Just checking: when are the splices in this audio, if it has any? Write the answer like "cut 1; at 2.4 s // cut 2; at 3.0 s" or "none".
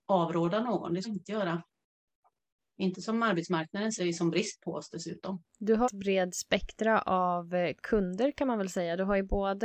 cut 1; at 1.0 s // cut 2; at 4.0 s // cut 3; at 5.5 s // cut 4; at 5.8 s